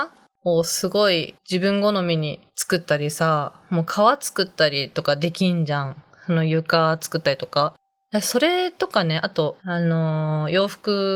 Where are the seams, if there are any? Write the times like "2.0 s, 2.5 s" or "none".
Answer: 2.5 s, 9.6 s